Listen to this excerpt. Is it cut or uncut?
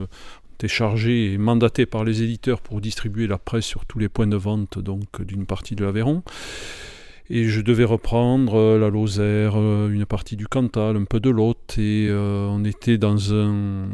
uncut